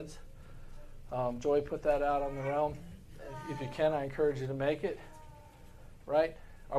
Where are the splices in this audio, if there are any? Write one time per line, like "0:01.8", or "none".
none